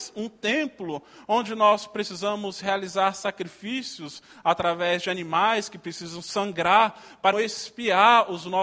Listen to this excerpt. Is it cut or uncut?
cut